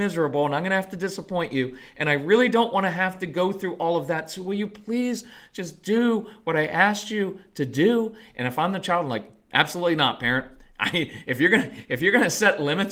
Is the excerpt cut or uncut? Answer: uncut